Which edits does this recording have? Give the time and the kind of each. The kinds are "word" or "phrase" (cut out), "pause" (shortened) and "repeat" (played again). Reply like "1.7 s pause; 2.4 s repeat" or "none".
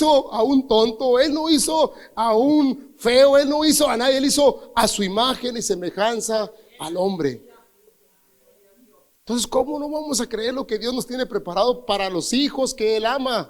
none